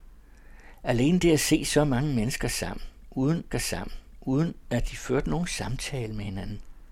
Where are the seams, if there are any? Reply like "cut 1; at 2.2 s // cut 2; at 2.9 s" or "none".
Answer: cut 1; at 3.5 s